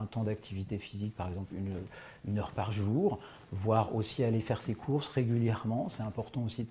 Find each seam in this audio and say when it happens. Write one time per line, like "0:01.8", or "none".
none